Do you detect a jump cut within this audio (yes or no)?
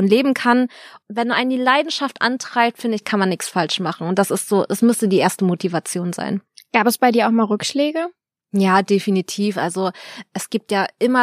no